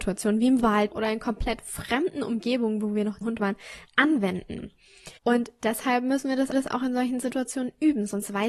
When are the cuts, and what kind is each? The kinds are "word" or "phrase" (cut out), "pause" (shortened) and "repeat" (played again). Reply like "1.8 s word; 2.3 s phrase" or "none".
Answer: 0.9 s phrase; 3.2 s phrase; 5.2 s pause; 6.5 s repeat